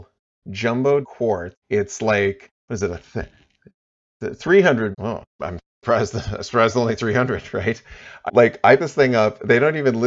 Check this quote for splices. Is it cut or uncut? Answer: cut